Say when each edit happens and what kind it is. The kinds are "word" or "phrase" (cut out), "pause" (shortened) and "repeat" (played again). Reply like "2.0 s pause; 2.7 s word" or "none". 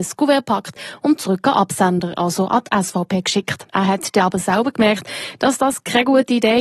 3.7 s pause